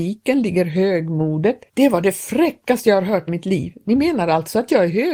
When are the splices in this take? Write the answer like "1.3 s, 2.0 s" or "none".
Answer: 1.7 s, 3.3 s